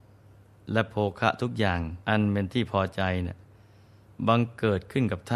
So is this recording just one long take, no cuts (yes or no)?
no